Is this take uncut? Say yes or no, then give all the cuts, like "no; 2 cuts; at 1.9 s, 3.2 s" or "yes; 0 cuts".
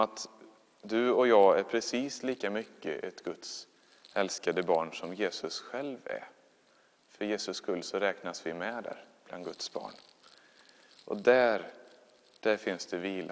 yes; 0 cuts